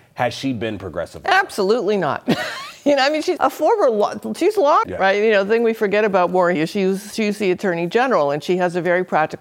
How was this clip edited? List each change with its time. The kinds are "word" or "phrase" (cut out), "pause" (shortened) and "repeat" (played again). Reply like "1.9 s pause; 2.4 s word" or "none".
3.4 s word; 4.8 s word; 6.6 s word